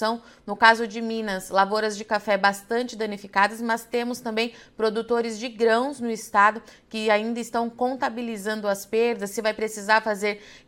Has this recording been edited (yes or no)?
no